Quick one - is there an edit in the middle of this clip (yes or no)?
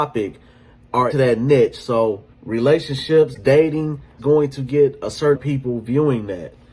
yes